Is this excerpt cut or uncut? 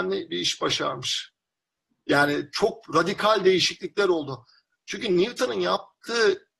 uncut